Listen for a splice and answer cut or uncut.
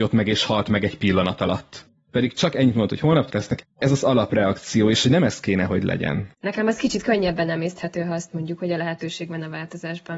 cut